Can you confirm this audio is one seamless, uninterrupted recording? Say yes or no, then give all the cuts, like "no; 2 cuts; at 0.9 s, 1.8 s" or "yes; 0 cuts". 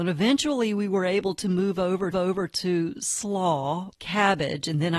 no; 2 cuts; at 2.1 s, 3.9 s